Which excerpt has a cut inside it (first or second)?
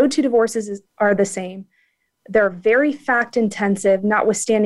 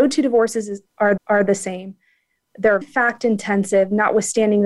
second